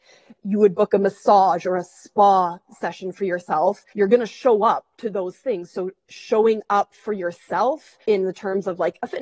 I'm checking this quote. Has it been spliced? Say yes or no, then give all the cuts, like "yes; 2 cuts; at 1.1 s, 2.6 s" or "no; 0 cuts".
yes; 3 cuts; at 3.9 s, 4.9 s, 8.0 s